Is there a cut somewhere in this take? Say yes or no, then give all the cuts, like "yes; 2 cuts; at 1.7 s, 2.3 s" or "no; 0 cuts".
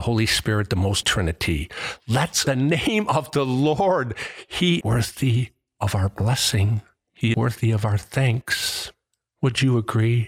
yes; 4 cuts; at 1.0 s, 2.5 s, 4.8 s, 7.3 s